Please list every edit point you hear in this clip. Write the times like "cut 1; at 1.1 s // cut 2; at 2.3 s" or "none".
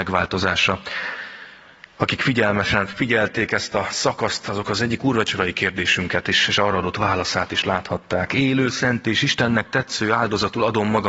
none